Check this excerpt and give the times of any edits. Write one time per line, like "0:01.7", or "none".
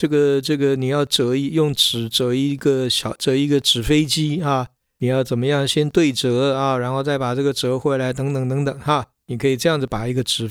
none